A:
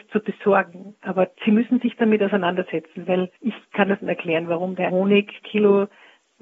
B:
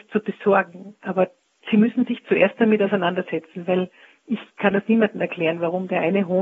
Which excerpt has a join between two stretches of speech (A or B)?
A